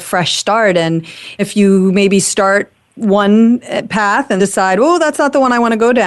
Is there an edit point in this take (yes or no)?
yes